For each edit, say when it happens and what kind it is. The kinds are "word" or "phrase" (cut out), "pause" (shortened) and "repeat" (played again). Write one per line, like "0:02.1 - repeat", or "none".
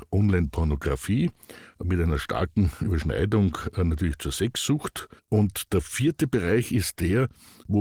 0:05.2 - pause